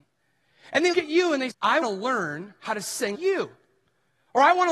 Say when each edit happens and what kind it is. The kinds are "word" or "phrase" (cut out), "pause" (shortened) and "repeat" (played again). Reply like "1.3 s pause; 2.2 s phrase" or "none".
0.9 s word; 1.5 s word; 1.8 s word; 3.1 s word